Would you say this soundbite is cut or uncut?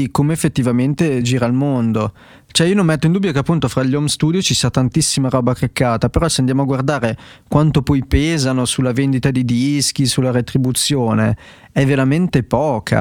uncut